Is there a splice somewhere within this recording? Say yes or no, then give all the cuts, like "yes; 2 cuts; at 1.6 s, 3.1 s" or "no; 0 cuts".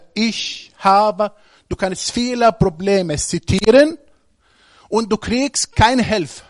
no; 0 cuts